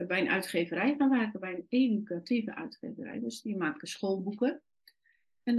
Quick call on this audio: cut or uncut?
uncut